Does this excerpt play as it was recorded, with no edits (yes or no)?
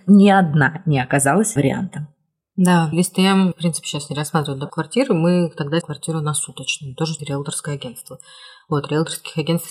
no